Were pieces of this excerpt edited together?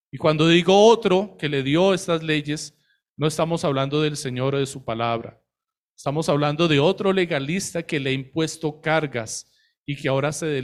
no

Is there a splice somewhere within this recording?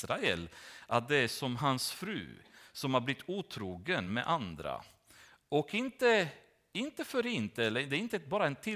no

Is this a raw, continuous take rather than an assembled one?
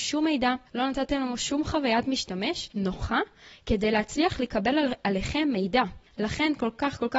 yes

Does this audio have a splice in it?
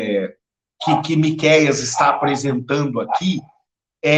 no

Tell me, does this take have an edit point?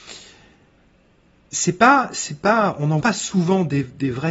yes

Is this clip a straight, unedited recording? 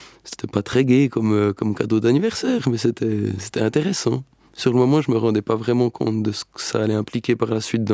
yes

